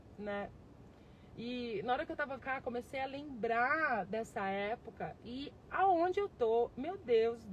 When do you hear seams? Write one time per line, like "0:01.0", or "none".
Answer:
0:02.4

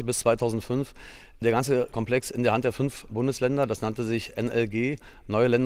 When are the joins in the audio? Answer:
0:03.1

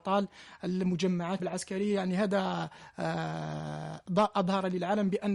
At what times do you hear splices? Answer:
0:01.4

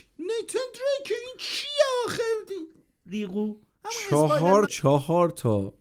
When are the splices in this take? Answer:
0:04.7

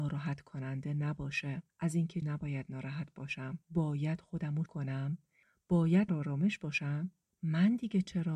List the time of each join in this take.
0:01.7
0:02.2
0:03.6
0:04.7
0:06.1

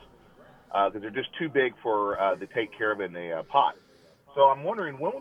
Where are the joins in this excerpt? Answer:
none

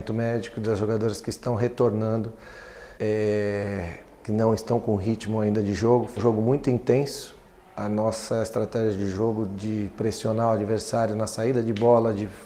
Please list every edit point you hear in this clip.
0:03.0
0:06.2

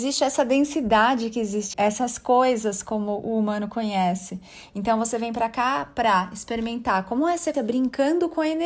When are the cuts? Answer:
0:01.7
0:07.5

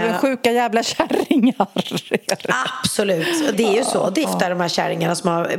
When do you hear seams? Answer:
0:03.5
0:04.2

